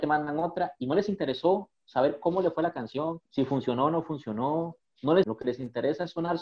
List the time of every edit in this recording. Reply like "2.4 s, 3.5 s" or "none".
3.3 s, 5.2 s